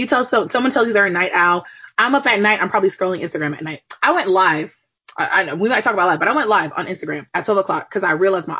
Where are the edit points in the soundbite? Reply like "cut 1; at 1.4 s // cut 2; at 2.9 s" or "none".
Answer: cut 1; at 7.3 s